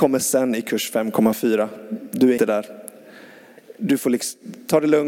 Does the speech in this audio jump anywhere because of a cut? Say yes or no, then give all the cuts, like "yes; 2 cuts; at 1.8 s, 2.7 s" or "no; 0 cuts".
yes; 1 cut; at 2.4 s